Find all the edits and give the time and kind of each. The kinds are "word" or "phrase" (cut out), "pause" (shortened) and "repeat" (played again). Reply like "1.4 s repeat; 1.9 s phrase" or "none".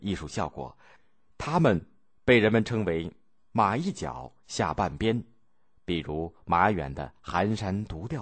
none